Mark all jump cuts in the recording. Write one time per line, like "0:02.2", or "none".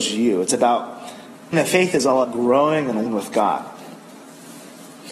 0:01.5
0:02.2
0:03.1